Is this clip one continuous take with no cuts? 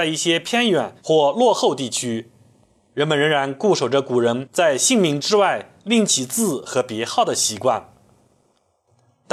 no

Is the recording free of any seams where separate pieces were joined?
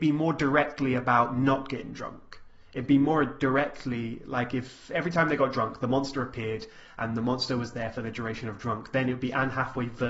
yes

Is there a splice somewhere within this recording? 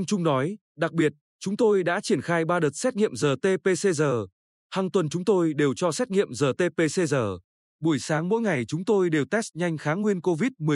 no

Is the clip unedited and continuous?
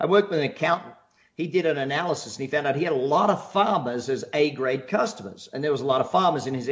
yes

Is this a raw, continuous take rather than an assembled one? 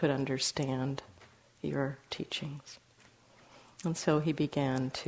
yes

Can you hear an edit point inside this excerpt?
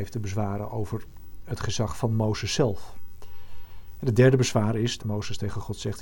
yes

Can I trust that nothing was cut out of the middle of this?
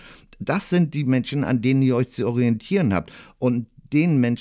yes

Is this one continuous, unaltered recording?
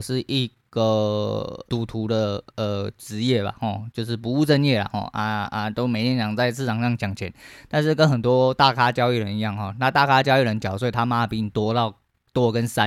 no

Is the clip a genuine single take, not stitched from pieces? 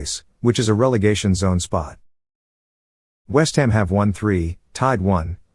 yes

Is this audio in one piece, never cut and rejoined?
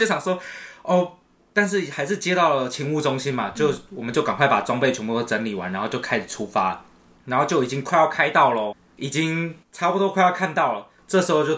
yes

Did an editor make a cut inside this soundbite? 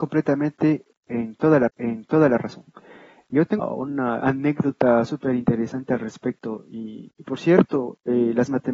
yes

